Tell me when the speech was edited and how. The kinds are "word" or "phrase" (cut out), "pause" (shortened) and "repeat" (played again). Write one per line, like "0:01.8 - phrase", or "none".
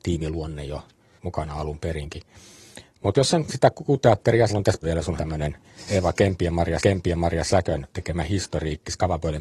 0:01.2 - word
0:03.1 - word
0:03.5 - word
0:04.5 - phrase
0:04.8 - word
0:05.2 - word
0:06.8 - repeat